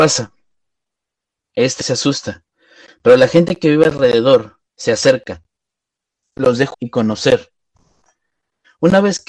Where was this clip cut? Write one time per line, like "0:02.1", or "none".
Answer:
0:01.8
0:04.7
0:06.7